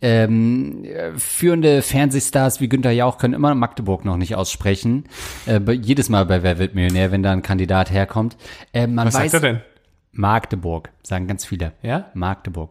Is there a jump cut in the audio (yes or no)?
no